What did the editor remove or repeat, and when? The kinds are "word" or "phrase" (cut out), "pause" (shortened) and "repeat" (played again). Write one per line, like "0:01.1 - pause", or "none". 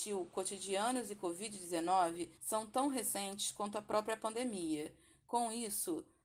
0:02.4 - pause